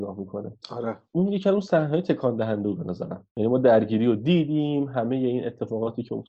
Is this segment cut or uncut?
uncut